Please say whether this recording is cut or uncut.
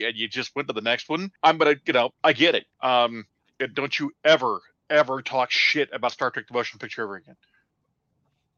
cut